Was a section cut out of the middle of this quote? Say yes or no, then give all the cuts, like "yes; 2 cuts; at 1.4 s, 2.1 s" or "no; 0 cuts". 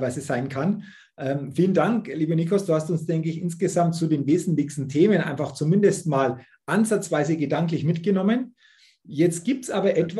no; 0 cuts